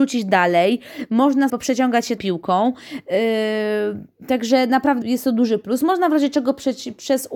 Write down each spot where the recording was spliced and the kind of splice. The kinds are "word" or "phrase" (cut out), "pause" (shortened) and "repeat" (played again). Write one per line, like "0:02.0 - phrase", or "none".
0:01.5 - word
0:02.2 - word
0:05.0 - word